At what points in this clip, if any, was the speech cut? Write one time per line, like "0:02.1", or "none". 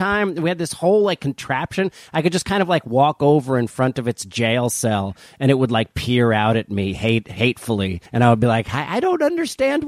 0:08.1